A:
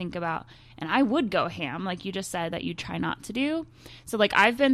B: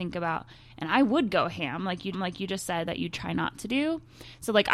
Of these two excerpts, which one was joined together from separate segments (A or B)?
B